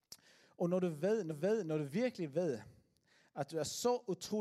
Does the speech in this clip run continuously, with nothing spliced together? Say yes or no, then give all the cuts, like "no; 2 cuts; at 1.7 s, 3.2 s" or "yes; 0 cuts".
no; 1 cut; at 1.3 s